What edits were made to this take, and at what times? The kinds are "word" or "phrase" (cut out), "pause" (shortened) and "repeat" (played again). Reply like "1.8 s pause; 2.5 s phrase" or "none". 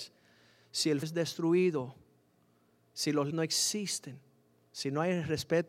1.0 s word; 3.3 s word